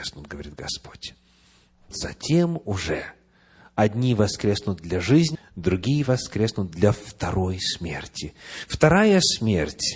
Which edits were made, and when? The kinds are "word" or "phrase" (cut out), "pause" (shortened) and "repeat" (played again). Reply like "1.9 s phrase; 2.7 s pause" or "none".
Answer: 1.9 s word; 5.3 s word